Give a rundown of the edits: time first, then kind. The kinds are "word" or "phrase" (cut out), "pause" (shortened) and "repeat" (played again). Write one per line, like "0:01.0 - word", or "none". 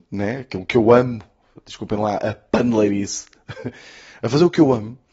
none